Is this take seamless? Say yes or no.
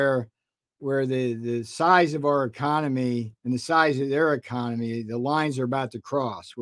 no